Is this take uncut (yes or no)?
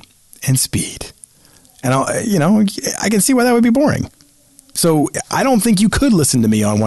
yes